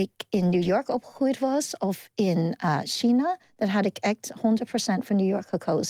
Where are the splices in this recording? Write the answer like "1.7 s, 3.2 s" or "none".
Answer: none